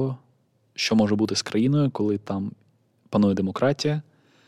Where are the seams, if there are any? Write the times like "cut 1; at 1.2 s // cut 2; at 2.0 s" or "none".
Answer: none